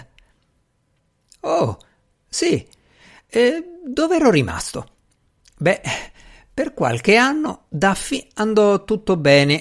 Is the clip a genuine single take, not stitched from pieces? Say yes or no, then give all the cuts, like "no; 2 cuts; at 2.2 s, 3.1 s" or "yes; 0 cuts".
yes; 0 cuts